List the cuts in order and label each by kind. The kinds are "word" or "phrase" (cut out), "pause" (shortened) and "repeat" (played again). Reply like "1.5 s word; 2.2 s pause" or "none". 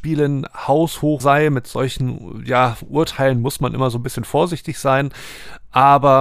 1.2 s word